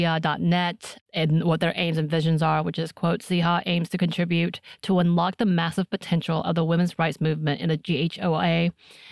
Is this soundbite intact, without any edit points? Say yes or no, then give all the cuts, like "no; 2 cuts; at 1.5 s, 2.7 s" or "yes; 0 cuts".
yes; 0 cuts